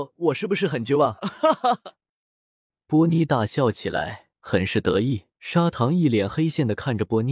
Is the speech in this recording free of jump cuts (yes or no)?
no